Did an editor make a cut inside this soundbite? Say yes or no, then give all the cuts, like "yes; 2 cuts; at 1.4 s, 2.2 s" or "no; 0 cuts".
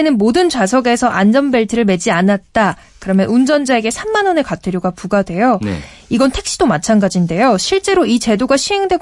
no; 0 cuts